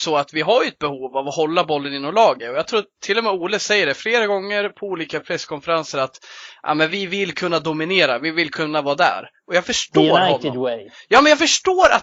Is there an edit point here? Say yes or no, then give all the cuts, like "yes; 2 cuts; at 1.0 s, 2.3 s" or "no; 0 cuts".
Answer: no; 0 cuts